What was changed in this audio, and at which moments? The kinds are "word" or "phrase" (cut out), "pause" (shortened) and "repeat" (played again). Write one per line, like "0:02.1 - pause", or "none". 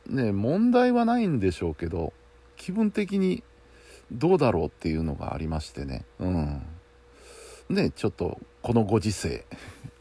0:06.1 - pause
0:07.6 - pause

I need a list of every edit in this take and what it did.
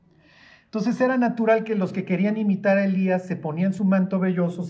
none

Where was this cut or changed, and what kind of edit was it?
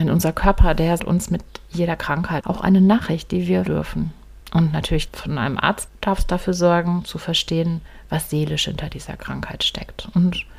0:01.0 - word
0:02.4 - phrase
0:03.7 - word
0:04.4 - pause
0:05.1 - phrase
0:05.9 - phrase

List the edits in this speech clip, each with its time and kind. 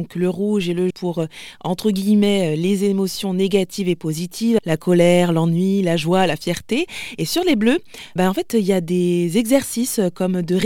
0:00.9 - word
0:04.6 - word
0:08.2 - word

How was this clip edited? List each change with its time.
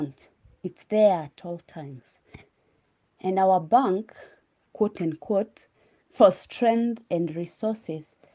none

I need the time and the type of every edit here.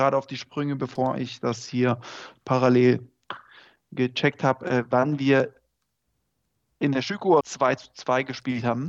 0:07.4 - word

